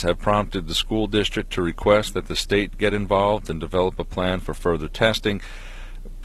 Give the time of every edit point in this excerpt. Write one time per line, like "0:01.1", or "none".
none